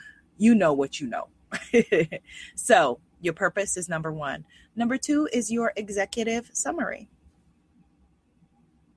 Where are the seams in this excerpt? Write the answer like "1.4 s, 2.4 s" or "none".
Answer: none